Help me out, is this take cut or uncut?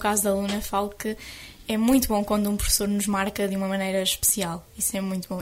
uncut